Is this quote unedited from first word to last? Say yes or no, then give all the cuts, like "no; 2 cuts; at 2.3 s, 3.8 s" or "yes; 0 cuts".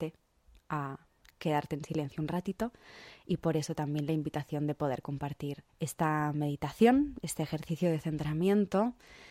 no; 1 cut; at 5.7 s